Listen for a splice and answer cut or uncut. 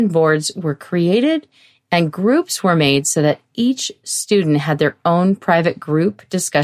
uncut